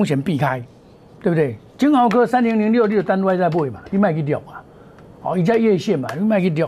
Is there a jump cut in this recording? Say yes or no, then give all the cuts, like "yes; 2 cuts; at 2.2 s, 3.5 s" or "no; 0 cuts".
no; 0 cuts